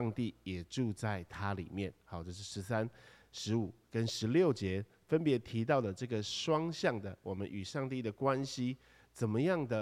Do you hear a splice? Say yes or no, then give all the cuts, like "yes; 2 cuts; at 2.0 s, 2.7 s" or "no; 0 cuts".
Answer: no; 0 cuts